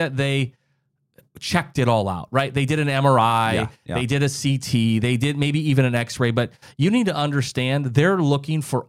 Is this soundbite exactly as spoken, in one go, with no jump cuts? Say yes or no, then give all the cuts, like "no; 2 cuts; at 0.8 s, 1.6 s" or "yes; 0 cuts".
yes; 0 cuts